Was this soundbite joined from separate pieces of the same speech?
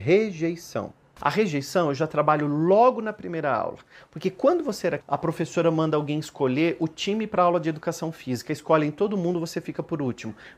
yes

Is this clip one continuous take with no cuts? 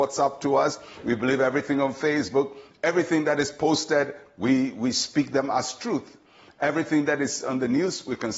yes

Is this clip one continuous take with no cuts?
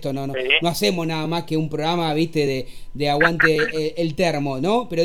yes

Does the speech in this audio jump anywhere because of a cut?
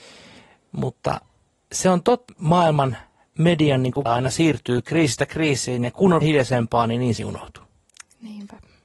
yes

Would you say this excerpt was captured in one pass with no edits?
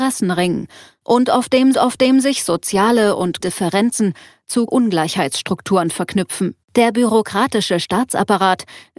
no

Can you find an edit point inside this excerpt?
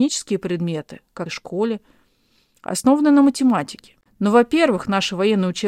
yes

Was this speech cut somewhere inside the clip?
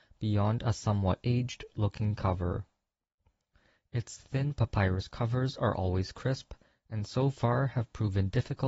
no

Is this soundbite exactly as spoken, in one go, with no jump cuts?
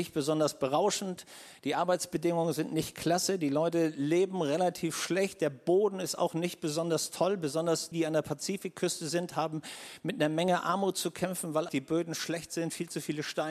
no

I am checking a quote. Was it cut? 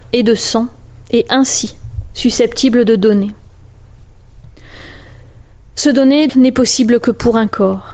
yes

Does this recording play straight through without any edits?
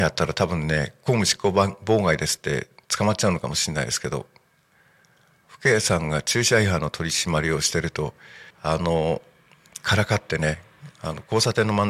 no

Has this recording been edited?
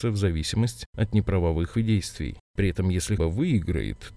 yes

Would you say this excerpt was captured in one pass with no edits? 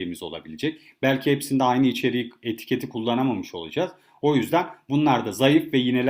yes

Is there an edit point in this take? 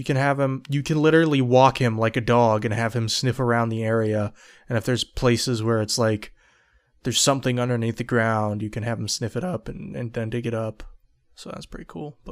no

